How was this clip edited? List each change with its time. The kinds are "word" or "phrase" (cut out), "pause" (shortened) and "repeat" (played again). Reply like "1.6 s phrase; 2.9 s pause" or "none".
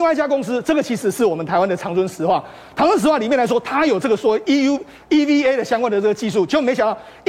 none